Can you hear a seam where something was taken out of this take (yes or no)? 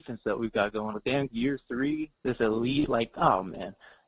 yes